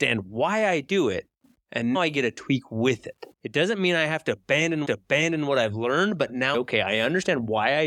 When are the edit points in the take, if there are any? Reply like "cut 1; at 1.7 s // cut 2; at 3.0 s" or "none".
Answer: cut 1; at 1.9 s // cut 2; at 3.3 s // cut 3; at 4.8 s // cut 4; at 6.5 s